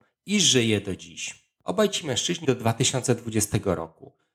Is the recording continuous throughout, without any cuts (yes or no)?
no